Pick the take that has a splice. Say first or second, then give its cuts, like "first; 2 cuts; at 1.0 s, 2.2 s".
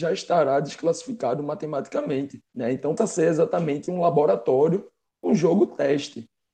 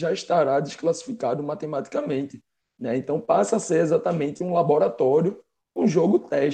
first; 2 cuts; at 2.5 s, 3.0 s